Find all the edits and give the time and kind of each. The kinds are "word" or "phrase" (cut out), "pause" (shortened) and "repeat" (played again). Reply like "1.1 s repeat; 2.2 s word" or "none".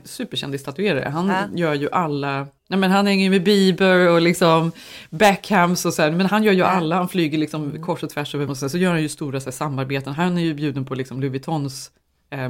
2.6 s pause; 8.5 s word